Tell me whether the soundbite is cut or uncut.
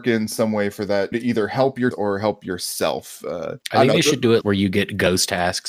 cut